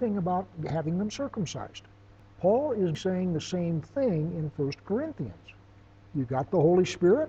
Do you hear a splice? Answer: no; 0 cuts

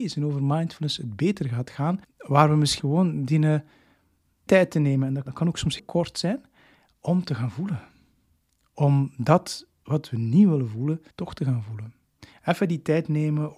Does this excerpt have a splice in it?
yes; 7 cuts; at 2.0 s, 2.8 s, 4.5 s, 5.3 s, 5.8 s, 8.4 s, 11.1 s

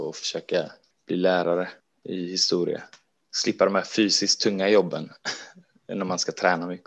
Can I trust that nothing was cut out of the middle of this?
yes; 0 cuts

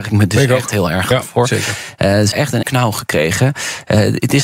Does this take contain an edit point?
yes; 2 cuts; at 2.3 s, 2.6 s

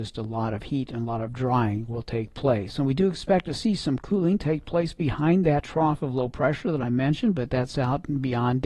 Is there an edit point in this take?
no; 0 cuts

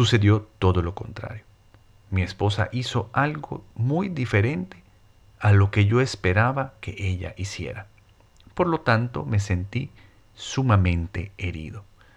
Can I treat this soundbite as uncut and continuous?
yes; 0 cuts

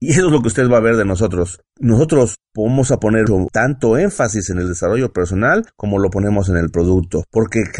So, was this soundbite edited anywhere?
no; 0 cuts

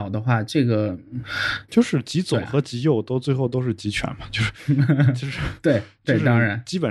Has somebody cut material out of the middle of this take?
yes; 1 cut; at 1.7 s

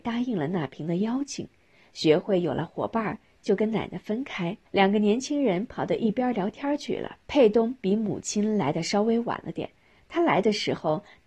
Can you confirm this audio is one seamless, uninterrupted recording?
no; 2 cuts; at 4.6 s, 7.2 s

